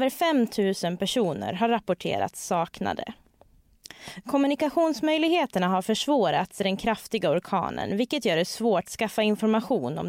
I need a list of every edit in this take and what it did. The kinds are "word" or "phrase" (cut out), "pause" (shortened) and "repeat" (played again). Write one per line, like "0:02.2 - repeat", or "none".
0:06.6 - word
0:08.8 - phrase